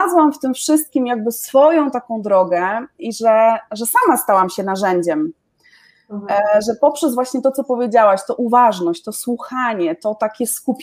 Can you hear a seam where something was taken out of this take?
no; 0 cuts

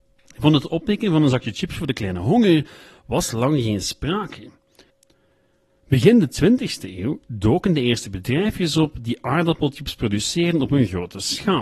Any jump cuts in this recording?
no; 0 cuts

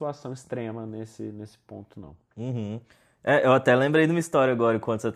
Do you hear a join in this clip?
no; 0 cuts

